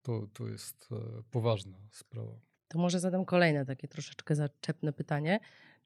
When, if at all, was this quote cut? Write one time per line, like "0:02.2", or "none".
none